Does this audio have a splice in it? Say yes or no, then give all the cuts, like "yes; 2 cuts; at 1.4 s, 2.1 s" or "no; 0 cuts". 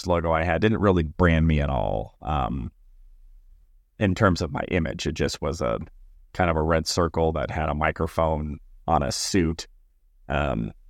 no; 0 cuts